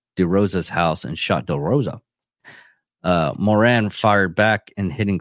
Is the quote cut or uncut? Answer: uncut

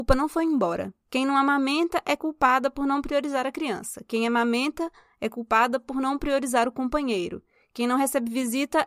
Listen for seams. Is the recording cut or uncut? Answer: uncut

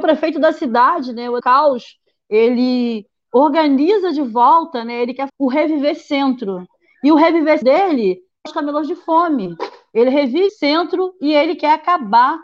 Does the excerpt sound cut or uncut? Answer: cut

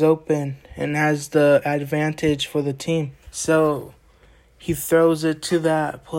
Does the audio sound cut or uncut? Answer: cut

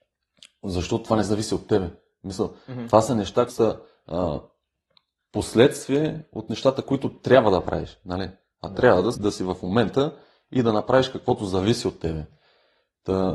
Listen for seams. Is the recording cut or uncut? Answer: cut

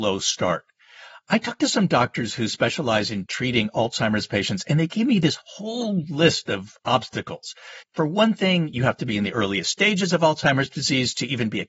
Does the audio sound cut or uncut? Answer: cut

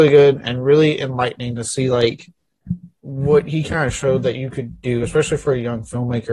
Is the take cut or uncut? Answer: uncut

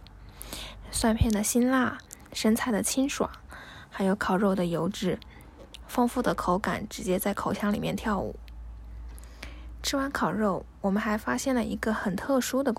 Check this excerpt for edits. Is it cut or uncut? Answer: cut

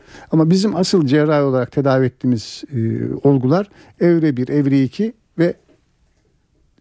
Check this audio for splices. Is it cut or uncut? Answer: uncut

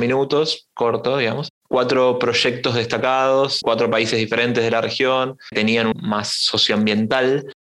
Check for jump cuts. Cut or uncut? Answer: cut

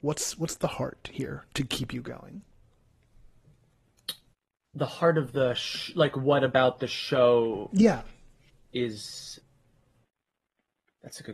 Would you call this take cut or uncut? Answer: uncut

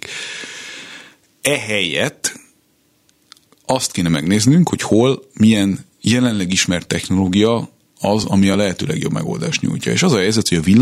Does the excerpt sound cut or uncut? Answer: uncut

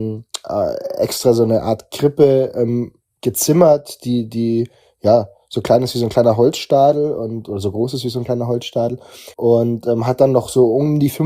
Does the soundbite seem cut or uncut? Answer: cut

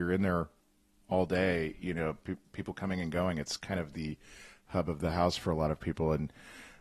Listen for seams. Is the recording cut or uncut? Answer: uncut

